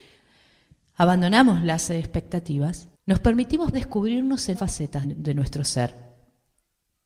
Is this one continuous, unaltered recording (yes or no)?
no